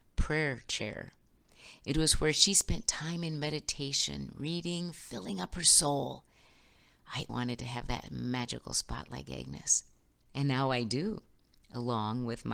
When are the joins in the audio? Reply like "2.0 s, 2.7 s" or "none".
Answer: 7.3 s